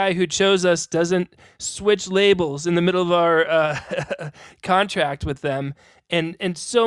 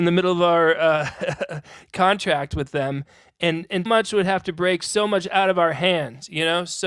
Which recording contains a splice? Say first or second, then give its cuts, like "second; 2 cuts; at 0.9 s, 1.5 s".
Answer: second; 1 cut; at 3.9 s